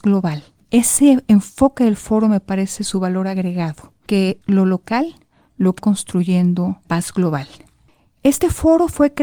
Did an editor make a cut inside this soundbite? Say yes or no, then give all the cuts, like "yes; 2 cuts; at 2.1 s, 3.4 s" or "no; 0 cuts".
yes; 3 cuts; at 4.4 s, 5.8 s, 6.8 s